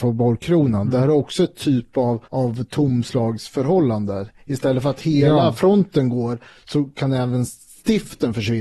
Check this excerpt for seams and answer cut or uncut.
uncut